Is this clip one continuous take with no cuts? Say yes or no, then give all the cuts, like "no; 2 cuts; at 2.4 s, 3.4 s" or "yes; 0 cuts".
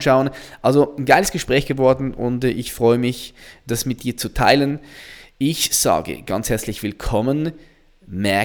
yes; 0 cuts